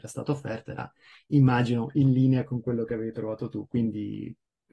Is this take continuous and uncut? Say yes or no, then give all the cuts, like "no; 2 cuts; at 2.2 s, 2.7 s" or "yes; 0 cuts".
yes; 0 cuts